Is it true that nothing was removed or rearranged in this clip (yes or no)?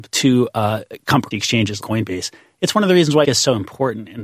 no